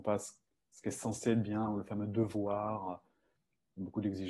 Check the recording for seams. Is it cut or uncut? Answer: uncut